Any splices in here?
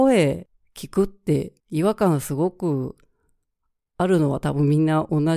yes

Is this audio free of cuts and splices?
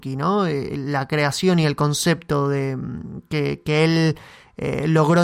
yes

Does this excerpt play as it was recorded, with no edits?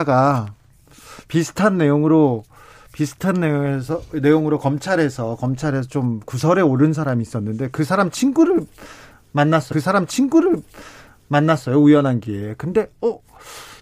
no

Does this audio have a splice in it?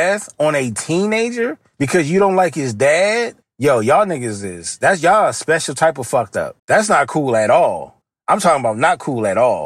yes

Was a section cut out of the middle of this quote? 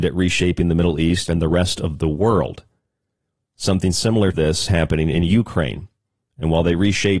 yes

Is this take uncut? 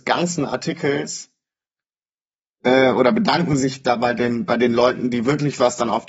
yes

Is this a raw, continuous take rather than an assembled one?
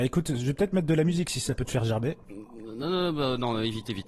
yes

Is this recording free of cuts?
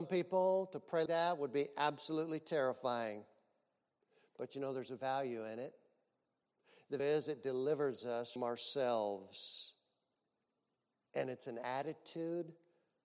no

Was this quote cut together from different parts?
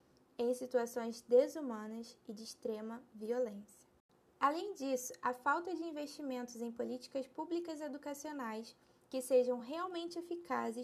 no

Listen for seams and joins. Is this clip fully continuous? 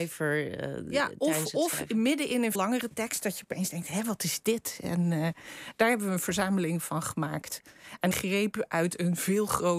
no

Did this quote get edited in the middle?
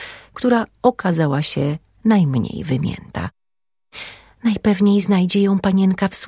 no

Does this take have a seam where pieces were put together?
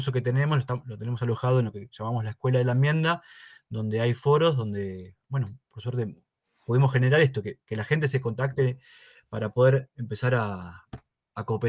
no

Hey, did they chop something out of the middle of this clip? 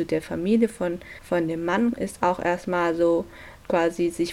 yes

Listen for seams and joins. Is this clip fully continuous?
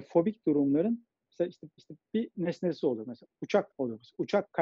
no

